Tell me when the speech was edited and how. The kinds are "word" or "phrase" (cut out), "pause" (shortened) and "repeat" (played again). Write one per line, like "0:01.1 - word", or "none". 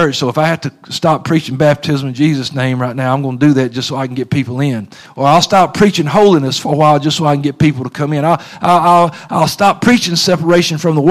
none